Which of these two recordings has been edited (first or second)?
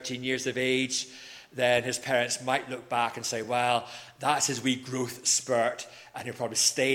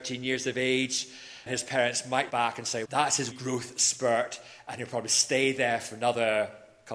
second